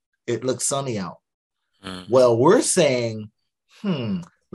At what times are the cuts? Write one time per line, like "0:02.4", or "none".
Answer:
none

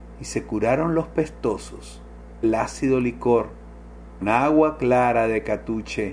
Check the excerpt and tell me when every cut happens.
0:02.4
0:04.2

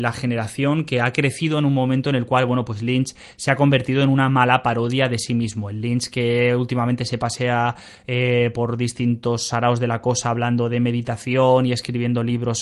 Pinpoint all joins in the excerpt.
none

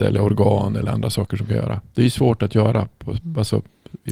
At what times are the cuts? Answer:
none

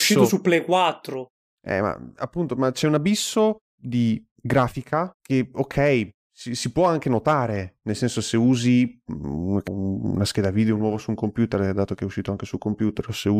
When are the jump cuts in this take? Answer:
0:03.6
0:05.1
0:09.7

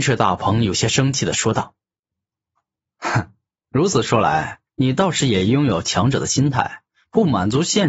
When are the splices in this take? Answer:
0:04.7

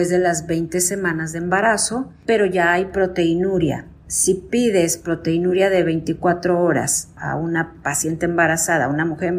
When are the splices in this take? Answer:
none

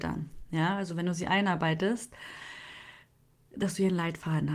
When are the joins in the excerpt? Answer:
none

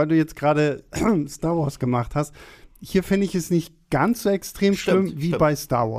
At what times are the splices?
none

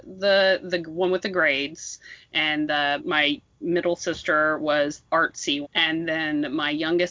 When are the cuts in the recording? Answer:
0:03.0
0:05.1
0:05.6

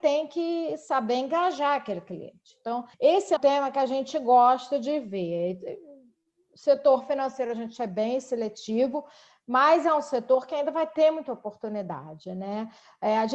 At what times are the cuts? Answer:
0:02.9
0:03.4

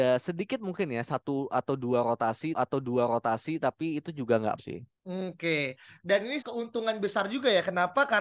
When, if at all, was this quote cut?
0:02.5
0:04.6
0:06.4

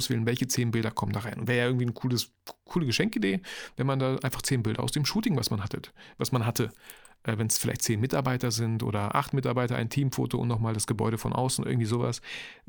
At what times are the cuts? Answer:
none

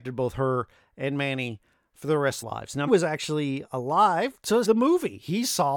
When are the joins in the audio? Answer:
0:02.4
0:02.9
0:04.6

